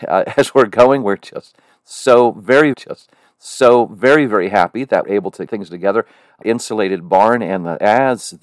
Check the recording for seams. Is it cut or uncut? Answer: cut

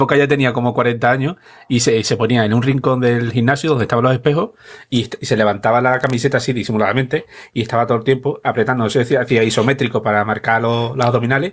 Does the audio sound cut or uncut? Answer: uncut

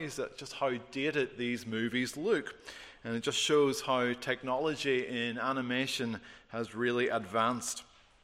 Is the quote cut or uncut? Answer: uncut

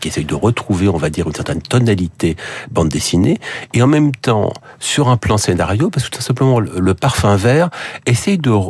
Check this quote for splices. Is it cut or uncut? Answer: uncut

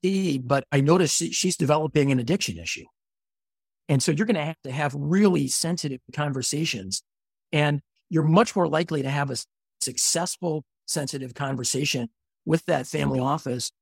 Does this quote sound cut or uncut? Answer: uncut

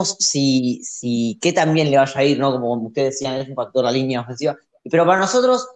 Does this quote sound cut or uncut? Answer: uncut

